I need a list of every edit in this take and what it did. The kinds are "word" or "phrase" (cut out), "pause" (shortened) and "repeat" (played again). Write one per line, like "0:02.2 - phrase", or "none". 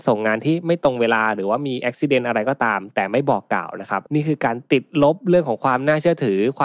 0:04.1 - pause